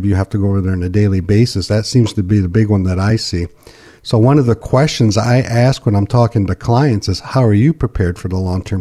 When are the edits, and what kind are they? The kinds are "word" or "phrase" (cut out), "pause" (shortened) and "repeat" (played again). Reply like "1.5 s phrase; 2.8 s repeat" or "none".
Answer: none